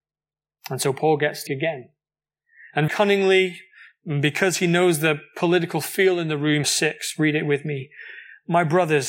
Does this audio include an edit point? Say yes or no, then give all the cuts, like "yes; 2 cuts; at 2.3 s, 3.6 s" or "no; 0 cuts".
yes; 3 cuts; at 1.5 s, 2.9 s, 6.6 s